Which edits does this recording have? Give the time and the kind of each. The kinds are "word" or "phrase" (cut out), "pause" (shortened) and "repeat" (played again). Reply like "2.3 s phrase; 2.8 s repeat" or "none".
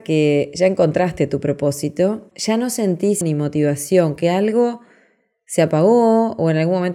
2.3 s word; 3.2 s word; 4.2 s word